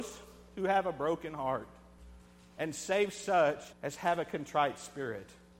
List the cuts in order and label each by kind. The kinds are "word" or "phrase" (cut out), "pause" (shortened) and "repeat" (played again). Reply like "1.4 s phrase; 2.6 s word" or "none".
3.7 s pause